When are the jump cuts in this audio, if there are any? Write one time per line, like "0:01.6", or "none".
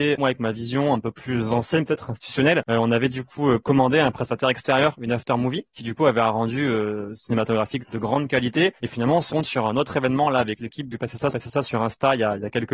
0:07.8
0:08.8
0:09.3
0:10.9
0:11.3